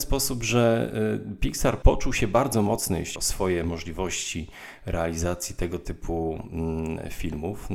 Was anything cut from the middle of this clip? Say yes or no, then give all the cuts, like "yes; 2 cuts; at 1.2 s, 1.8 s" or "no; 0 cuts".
yes; 2 cuts; at 1.8 s, 3.2 s